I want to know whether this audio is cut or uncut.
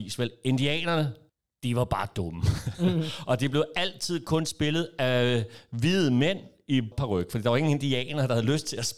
cut